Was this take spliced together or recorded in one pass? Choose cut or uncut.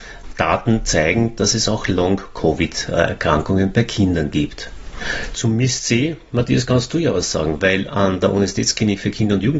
uncut